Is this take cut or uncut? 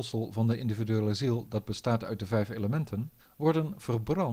cut